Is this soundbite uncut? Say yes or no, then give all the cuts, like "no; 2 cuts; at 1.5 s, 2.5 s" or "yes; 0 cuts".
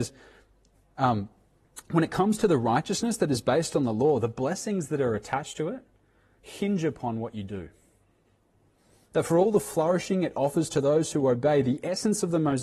yes; 0 cuts